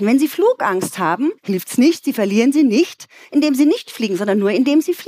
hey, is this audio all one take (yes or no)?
no